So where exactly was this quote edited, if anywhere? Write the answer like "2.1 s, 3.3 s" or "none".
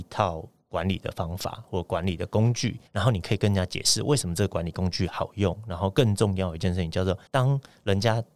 2.9 s, 7.3 s